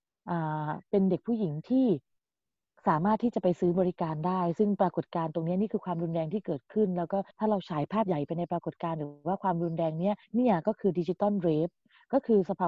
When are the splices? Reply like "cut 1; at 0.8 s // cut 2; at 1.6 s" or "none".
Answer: cut 1; at 7.3 s // cut 2; at 10.2 s